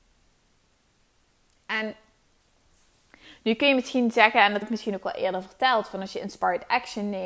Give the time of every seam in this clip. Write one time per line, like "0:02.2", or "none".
0:04.6